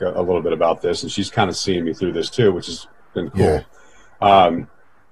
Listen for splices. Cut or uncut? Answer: uncut